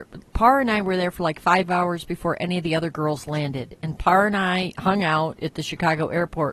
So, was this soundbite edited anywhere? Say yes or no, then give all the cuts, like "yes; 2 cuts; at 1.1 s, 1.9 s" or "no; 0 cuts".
no; 0 cuts